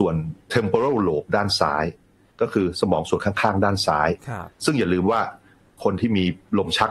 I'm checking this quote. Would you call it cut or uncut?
uncut